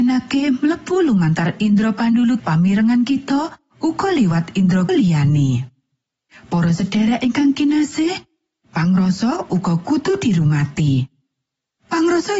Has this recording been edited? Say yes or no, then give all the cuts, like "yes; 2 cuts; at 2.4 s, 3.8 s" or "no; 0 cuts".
yes; 2 cuts; at 2.4 s, 4.9 s